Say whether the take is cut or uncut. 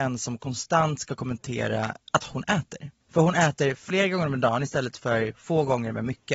cut